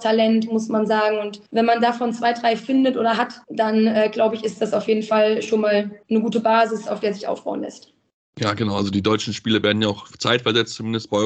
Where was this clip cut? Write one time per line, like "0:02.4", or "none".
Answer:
0:01.5
0:03.4
0:06.0